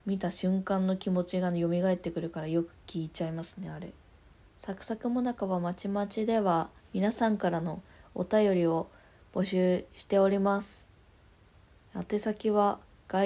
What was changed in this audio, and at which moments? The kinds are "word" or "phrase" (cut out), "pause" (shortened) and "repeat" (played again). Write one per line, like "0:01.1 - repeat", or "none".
none